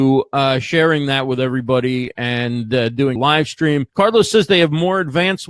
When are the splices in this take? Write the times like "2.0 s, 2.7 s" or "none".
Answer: 3.2 s, 3.9 s